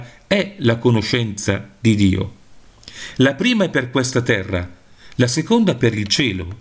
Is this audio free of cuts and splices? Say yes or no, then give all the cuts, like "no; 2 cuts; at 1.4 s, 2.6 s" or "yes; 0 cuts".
yes; 0 cuts